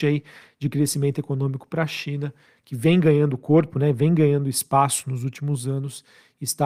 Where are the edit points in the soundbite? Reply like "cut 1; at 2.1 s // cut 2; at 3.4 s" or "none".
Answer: none